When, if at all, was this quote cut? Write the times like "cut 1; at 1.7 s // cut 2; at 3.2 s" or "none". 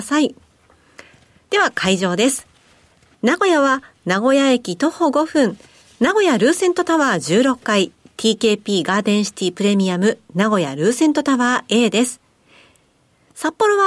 none

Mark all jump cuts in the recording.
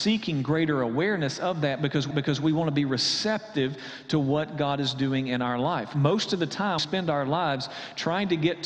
cut 1; at 2.1 s // cut 2; at 6.8 s

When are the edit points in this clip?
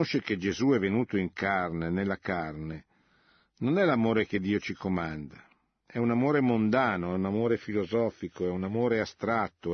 none

